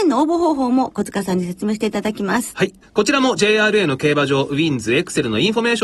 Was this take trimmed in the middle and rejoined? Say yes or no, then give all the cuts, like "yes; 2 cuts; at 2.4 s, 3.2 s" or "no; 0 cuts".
yes; 1 cut; at 2.8 s